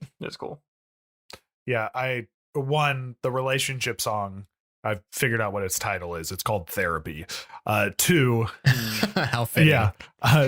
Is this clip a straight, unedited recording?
yes; 0 cuts

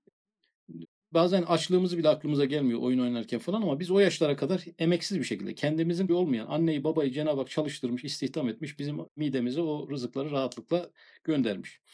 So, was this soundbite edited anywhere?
yes; 1 cut; at 6.1 s

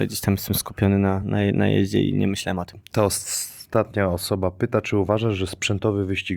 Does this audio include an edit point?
no; 0 cuts

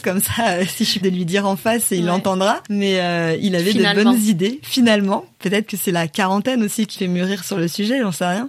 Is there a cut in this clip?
yes; 2 cuts; at 1.0 s, 7.0 s

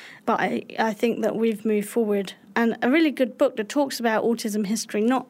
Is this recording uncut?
yes; 0 cuts

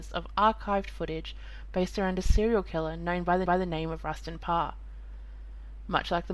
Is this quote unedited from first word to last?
no; 1 cut; at 3.5 s

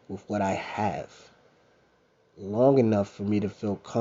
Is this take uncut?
yes; 0 cuts

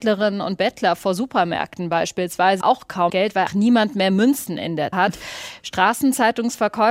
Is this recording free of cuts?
no; 4 cuts; at 2.6 s, 3.1 s, 3.5 s, 4.9 s

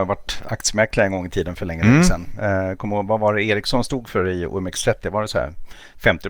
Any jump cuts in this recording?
no; 0 cuts

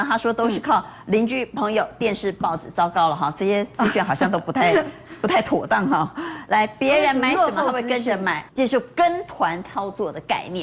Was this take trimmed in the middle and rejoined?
yes; 1 cut; at 8.5 s

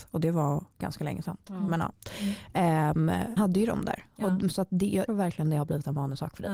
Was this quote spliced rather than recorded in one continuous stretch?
yes; 2 cuts; at 3.4 s, 5.1 s

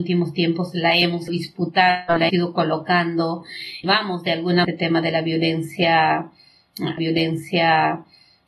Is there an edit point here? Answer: yes; 5 cuts; at 1.3 s, 2.3 s, 3.8 s, 4.6 s, 7.0 s

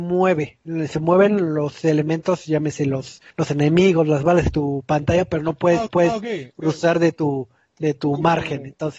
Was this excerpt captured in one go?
no; 2 cuts; at 3.3 s, 5.9 s

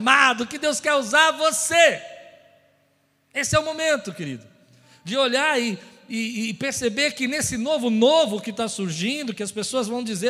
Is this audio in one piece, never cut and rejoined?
yes; 0 cuts

